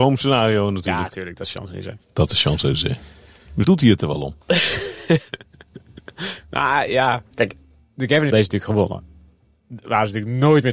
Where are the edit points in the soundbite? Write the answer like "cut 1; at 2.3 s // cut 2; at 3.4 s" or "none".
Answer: cut 1; at 3.6 s // cut 2; at 4.4 s // cut 3; at 7.3 s // cut 4; at 8.3 s